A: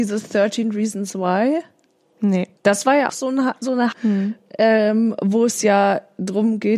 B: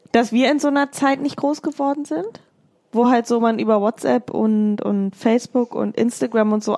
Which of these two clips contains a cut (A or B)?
A